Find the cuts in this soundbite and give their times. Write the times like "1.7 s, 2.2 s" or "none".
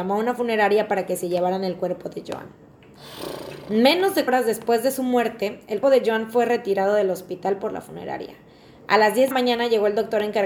4.3 s, 5.8 s, 9.3 s